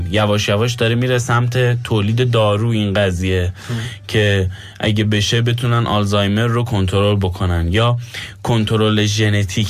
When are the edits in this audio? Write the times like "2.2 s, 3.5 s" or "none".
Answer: none